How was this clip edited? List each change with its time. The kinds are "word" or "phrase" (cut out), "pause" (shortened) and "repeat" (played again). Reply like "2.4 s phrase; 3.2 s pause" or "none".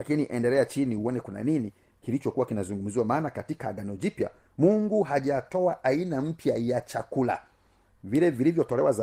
none